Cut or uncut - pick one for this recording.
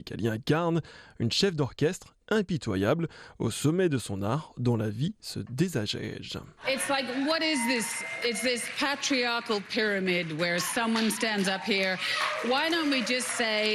cut